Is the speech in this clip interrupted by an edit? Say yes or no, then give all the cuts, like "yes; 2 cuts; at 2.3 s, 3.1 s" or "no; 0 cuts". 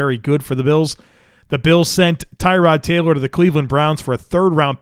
no; 0 cuts